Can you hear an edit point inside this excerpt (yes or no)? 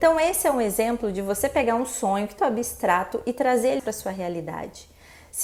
yes